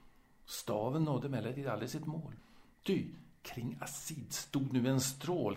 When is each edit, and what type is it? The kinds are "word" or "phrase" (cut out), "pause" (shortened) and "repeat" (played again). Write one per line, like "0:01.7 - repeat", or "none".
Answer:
none

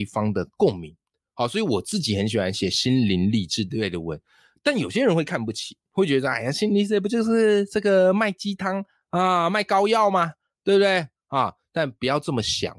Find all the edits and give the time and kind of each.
none

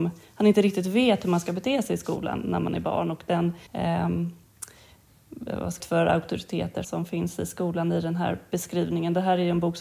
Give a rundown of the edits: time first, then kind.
0:03.7 - pause
0:05.8 - phrase
0:06.8 - word

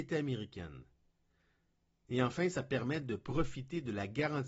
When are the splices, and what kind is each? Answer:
none

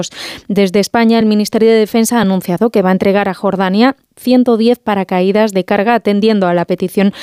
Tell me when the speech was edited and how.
none

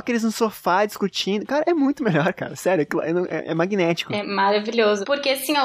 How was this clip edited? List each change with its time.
none

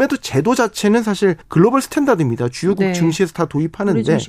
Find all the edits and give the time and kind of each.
0:01.4 - pause

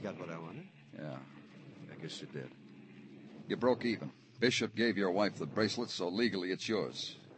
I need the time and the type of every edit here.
none

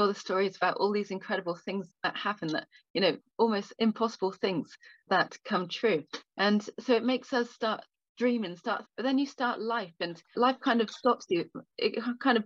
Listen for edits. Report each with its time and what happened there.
0:01.9 - word
0:03.3 - word
0:03.8 - word
0:05.1 - word
0:08.8 - word
0:10.3 - word

